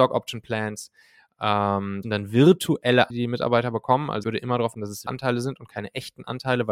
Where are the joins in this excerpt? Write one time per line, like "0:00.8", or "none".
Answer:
0:02.0
0:03.1
0:04.2
0:04.7
0:05.1

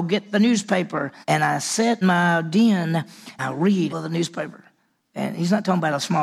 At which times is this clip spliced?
0:01.2
0:02.0
0:03.4
0:03.9
0:04.8

